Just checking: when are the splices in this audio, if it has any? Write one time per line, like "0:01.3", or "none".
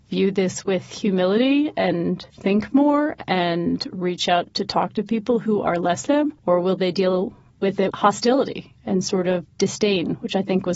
0:02.3
0:06.1
0:06.4
0:07.9
0:09.5